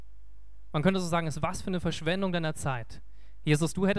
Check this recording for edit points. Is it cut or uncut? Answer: uncut